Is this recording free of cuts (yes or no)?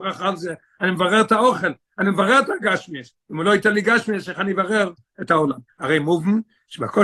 no